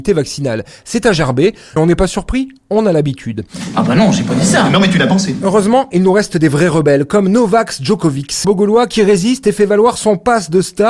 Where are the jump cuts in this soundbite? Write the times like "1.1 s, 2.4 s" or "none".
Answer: 1.8 s, 8.4 s